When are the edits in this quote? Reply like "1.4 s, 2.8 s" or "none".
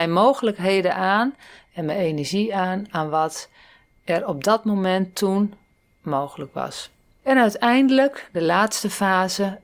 none